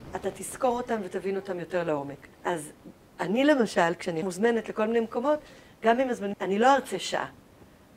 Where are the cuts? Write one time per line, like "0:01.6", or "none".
0:02.3
0:04.2
0:06.3